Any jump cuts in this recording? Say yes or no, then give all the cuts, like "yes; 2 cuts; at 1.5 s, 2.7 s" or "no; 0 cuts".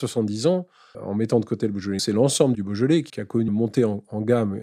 yes; 5 cuts; at 0.9 s, 2.0 s, 2.5 s, 3.1 s, 3.5 s